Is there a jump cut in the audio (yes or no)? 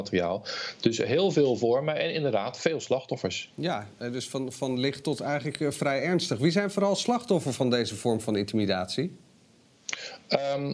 no